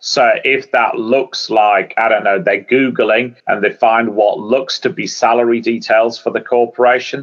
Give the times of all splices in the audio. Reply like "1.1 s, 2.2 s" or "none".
3.4 s